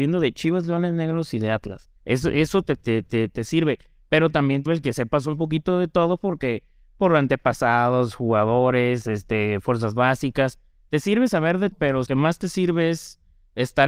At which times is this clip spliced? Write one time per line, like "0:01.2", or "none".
0:02.0
0:03.0
0:04.7
0:11.7
0:12.1